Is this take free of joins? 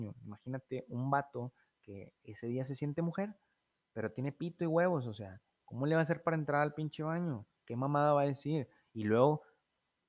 yes; 0 cuts

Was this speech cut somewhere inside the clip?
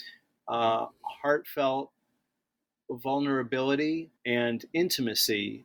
yes; 1 cut; at 4.2 s

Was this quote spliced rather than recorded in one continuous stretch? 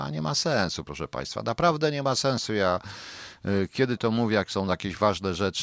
yes; 1 cut; at 4.0 s

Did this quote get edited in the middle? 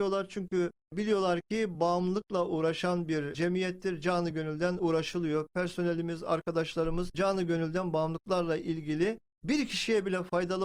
no; 0 cuts

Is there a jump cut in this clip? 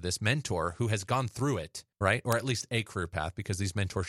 yes; 1 cut; at 1.9 s

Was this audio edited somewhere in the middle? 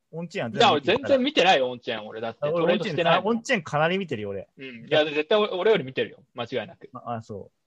yes; 1 cut; at 4.5 s

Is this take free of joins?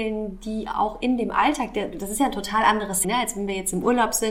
no; 1 cut; at 3.0 s

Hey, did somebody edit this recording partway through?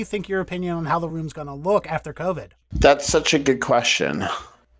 yes; 1 cut; at 1.1 s

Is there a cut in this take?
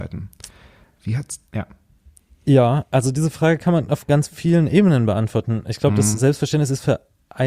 yes; 1 cut; at 1.5 s

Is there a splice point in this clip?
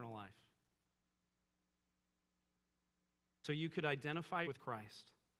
yes; 1 cut; at 4.4 s

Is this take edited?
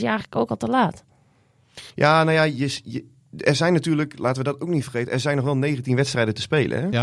yes; 1 cut; at 1.9 s

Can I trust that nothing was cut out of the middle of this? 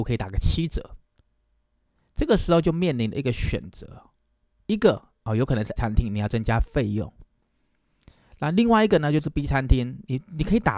no; 1 cut; at 5.8 s

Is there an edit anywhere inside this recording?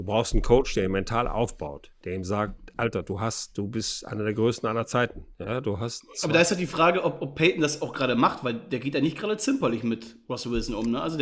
no; 0 cuts

